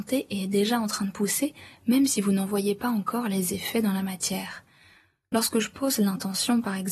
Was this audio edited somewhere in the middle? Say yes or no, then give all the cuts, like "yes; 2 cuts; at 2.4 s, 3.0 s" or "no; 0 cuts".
no; 0 cuts